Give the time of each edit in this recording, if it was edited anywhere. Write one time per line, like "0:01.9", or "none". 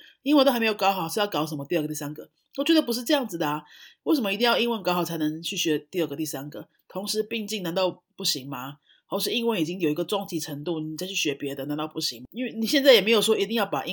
none